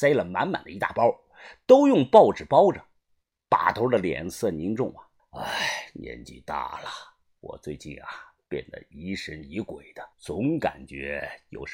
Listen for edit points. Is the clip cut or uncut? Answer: cut